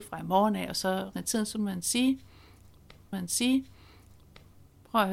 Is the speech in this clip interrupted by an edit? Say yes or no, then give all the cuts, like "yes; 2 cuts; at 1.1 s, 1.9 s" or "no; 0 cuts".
yes; 2 cuts; at 1.1 s, 3.1 s